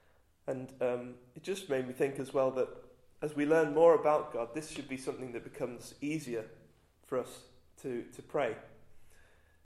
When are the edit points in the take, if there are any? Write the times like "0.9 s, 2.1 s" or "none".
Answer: none